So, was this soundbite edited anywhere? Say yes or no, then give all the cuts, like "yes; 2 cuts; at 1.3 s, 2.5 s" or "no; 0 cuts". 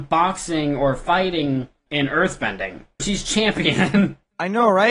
yes; 2 cuts; at 1.9 s, 3.0 s